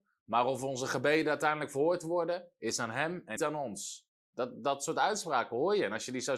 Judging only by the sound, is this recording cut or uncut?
cut